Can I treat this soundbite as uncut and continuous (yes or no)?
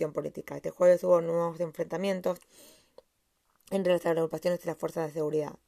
yes